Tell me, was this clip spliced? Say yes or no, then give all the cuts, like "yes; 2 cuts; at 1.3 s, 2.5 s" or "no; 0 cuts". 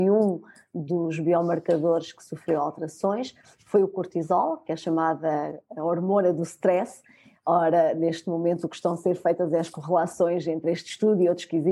no; 0 cuts